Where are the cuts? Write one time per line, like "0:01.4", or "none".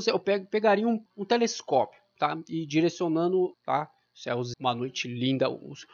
0:01.1
0:03.5
0:04.5